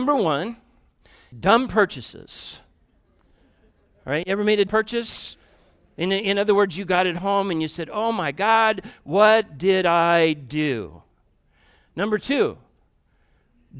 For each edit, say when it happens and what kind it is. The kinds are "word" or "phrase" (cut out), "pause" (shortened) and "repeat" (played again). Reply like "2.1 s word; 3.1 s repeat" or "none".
1.3 s word; 4.7 s word